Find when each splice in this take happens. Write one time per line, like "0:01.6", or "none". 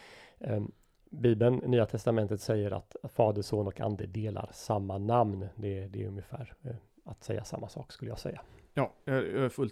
none